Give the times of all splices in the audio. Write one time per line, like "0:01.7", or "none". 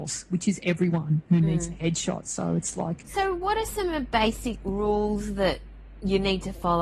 none

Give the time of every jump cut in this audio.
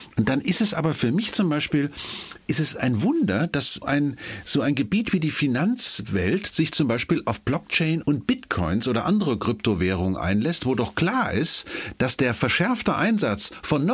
0:03.8
0:08.0

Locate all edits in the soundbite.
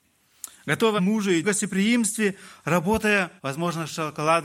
0:01.0
0:01.4
0:03.4

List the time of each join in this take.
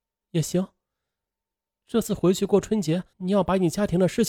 0:03.1

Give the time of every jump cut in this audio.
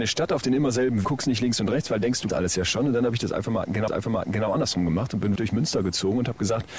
0:01.0
0:02.3
0:03.9
0:05.4

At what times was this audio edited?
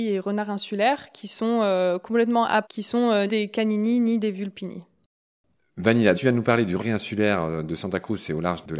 0:02.6
0:03.3
0:06.1
0:06.8

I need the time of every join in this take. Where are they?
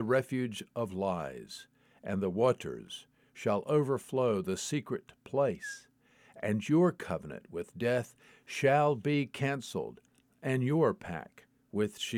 none

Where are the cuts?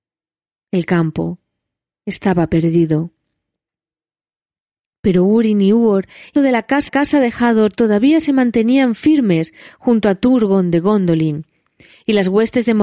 0:06.4
0:06.9

